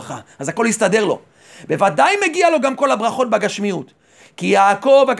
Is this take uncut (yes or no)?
yes